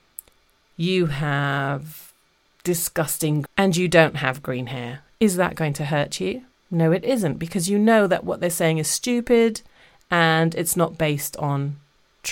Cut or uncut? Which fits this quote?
cut